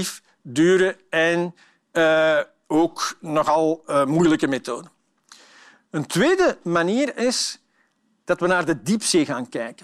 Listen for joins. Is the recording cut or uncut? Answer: uncut